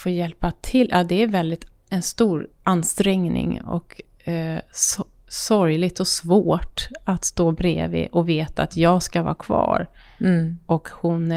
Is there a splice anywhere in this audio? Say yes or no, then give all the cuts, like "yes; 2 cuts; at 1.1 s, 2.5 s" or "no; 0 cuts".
no; 0 cuts